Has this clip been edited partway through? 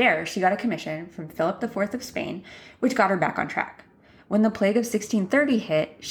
no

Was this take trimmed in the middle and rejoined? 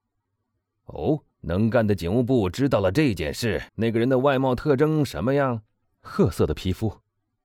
yes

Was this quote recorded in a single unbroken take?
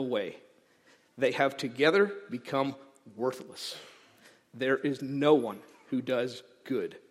yes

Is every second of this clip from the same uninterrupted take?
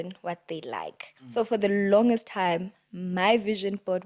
no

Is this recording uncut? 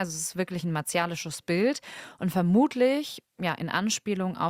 yes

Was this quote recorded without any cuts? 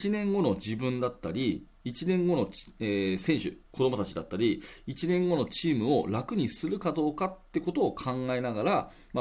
yes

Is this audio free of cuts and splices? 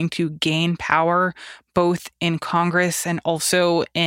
yes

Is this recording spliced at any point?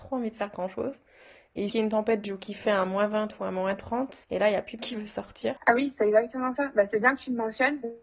yes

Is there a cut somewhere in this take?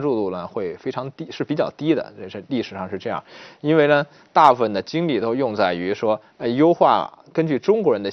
no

